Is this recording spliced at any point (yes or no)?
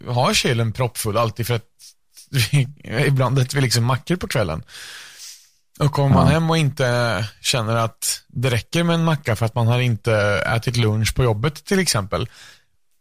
no